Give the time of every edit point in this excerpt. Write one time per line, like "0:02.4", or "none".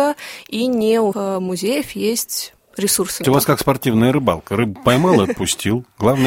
0:01.1
0:03.2